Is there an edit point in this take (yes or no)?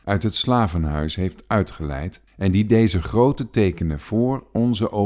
yes